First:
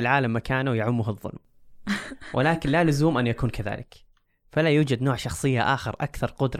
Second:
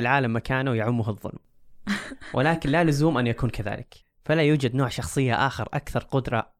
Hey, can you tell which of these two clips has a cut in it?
second; 1 cut; at 4.0 s

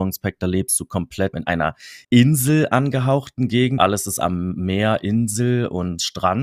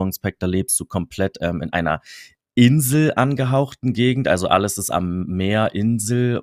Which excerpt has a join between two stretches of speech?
first; 3 cuts; at 1.3 s, 2.0 s, 3.8 s

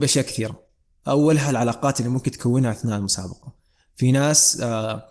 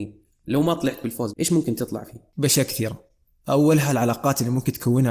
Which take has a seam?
second; 1 cut; at 1.3 s

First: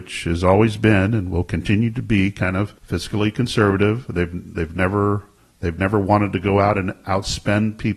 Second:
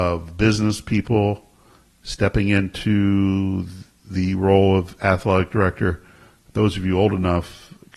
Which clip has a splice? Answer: first; 2 cuts; at 2.8 s, 5.4 s

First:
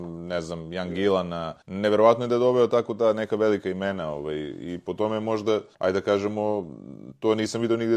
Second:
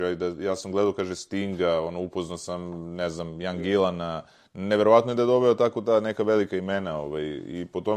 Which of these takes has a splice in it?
first; 2 cuts; at 1.6 s, 5.7 s

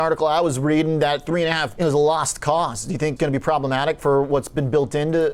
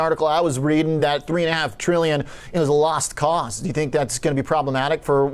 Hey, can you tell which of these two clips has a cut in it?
first; 2 cuts; at 1.8 s, 3.2 s

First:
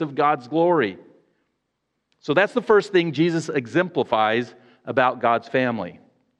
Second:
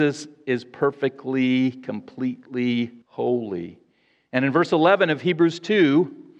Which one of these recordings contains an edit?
second; 1 cut; at 3.0 s

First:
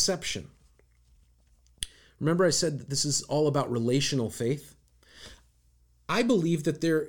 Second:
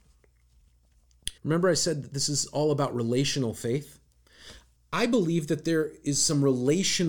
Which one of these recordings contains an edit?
second; 2 cuts; at 1.4 s, 4.8 s

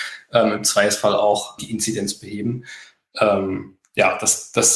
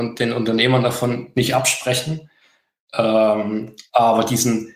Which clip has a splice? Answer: first; 1 cut; at 1.6 s

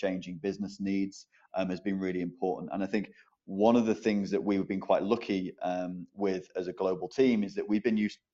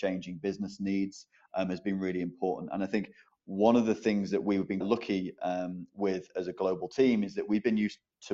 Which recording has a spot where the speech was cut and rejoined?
second; 1 cut; at 4.8 s

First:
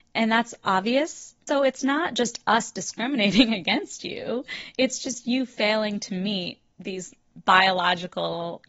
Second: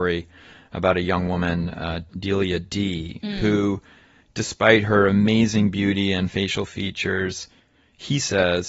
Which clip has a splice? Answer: first; 1 cut; at 1.5 s

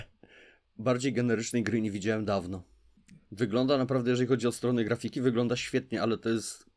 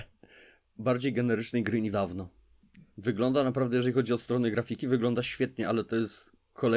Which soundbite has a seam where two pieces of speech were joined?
second; 1 cut; at 1.9 s

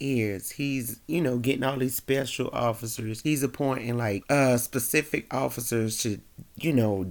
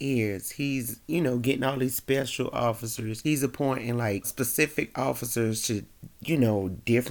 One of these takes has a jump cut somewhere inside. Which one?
second; 1 cut; at 4.2 s

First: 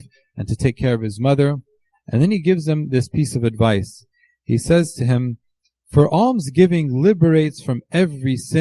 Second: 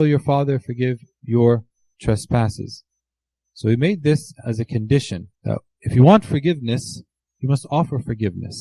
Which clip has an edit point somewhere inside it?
second; 1 cut; at 5.3 s

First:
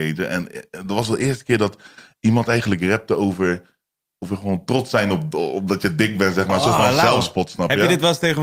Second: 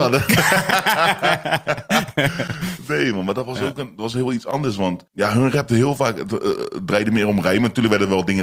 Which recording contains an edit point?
second; 1 cut; at 5.1 s

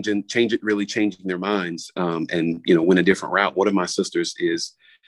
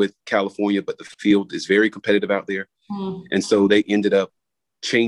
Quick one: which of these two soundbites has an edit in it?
second; 1 cut; at 1.1 s

